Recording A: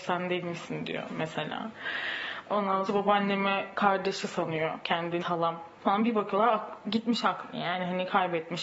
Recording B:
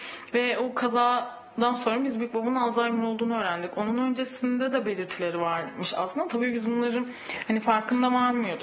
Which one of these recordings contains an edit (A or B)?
A